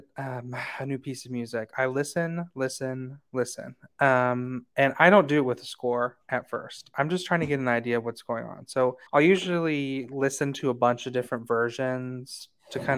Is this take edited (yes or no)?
yes